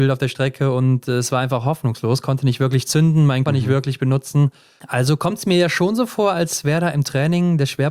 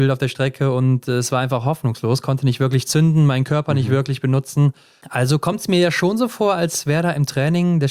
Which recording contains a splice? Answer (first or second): first